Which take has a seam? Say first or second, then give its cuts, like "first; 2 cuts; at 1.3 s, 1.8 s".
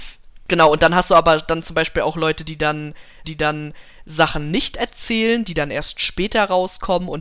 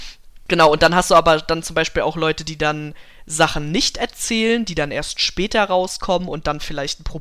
first; 1 cut; at 3.2 s